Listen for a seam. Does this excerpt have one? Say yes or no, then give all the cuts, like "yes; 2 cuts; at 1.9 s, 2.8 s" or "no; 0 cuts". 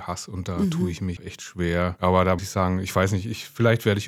yes; 2 cuts; at 1.2 s, 2.4 s